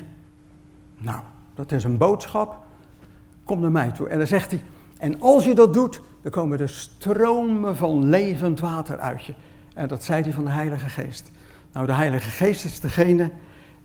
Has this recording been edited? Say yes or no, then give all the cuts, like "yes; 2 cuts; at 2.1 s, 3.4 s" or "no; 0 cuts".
no; 0 cuts